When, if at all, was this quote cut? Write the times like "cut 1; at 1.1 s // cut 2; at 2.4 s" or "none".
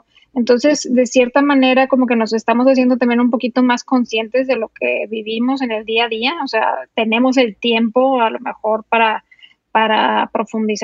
none

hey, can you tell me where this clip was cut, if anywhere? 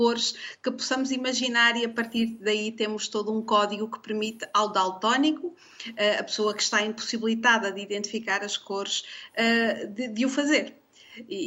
none

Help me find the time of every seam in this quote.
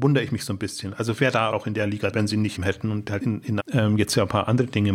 cut 1; at 1.2 s // cut 2; at 1.5 s // cut 3; at 2.1 s // cut 4; at 2.6 s // cut 5; at 3.2 s // cut 6; at 3.6 s

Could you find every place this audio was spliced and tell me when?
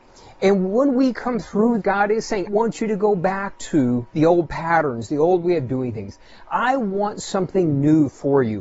cut 1; at 1.8 s // cut 2; at 2.5 s // cut 3; at 4.1 s

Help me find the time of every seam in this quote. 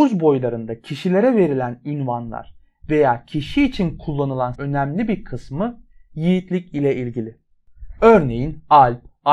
cut 1; at 4.5 s

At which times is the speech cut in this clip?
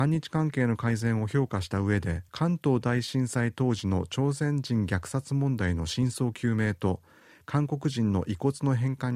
cut 1; at 2.3 s

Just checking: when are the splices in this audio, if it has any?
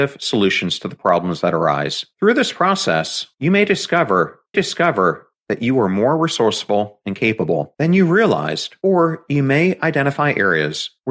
cut 1; at 4.5 s

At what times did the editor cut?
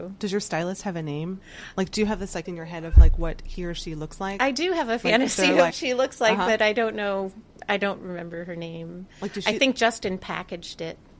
cut 1; at 2.5 s // cut 2; at 5.7 s

